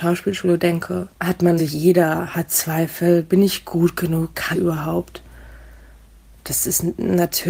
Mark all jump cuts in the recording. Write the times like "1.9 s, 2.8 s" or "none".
1.1 s, 1.6 s, 4.5 s